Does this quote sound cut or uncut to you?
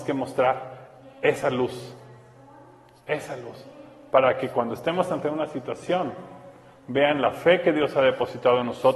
uncut